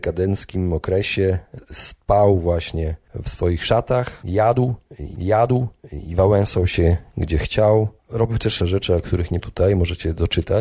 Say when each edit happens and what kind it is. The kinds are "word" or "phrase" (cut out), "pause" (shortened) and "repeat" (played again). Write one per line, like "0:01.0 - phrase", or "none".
0:05.1 - repeat
0:08.0 - pause
0:08.6 - phrase
0:09.4 - word